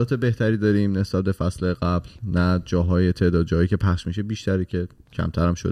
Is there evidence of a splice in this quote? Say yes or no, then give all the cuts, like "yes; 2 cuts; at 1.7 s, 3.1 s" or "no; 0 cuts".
no; 0 cuts